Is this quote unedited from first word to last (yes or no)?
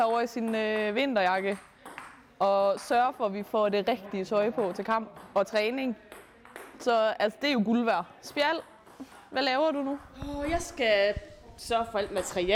yes